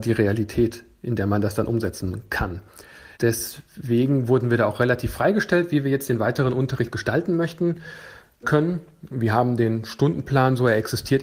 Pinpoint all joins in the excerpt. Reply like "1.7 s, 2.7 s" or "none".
3.1 s, 8.4 s

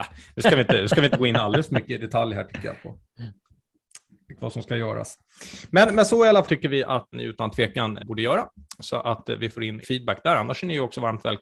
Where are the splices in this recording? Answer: 4.4 s, 6.4 s, 7.1 s, 8.0 s, 9.8 s

